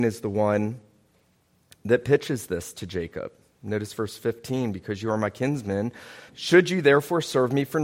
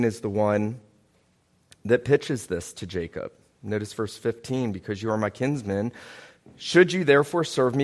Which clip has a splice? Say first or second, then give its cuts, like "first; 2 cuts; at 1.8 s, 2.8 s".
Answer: first; 1 cut; at 6.3 s